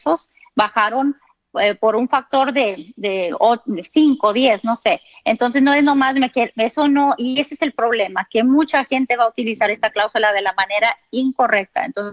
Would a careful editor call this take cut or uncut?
uncut